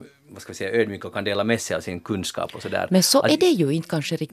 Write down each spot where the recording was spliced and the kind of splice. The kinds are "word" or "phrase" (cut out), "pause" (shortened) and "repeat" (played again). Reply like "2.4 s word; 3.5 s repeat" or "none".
none